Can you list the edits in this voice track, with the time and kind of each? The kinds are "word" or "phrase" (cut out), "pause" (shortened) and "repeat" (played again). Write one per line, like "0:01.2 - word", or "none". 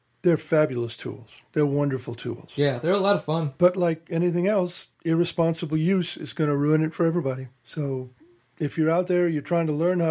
0:04.9 - pause
0:07.6 - pause